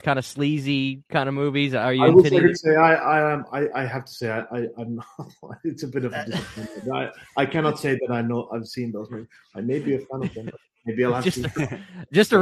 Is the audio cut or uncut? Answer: uncut